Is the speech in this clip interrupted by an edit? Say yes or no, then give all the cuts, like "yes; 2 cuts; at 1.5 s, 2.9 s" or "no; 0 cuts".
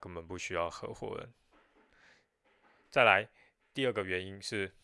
no; 0 cuts